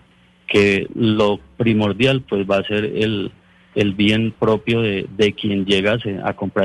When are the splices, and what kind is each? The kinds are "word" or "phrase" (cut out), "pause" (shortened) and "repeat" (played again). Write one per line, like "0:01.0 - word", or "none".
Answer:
none